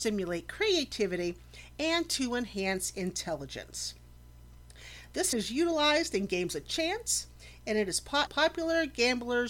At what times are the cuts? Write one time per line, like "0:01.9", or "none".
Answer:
0:05.3
0:08.3